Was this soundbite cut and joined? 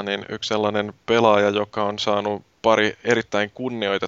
no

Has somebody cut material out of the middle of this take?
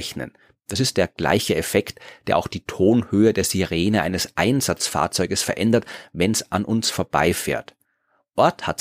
no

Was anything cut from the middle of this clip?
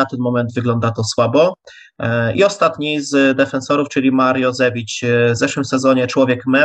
no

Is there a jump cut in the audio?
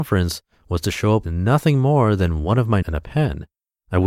yes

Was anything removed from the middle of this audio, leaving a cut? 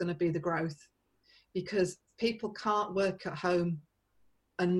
no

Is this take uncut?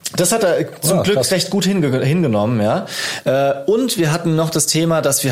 yes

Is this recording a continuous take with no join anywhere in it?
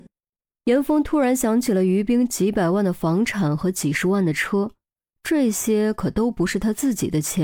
yes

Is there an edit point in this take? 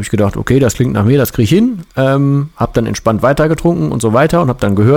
yes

